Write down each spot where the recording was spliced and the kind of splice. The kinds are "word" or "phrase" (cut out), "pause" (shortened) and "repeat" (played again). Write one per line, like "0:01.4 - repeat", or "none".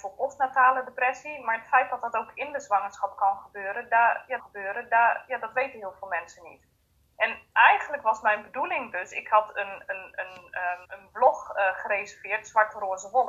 0:04.4 - repeat
0:10.8 - pause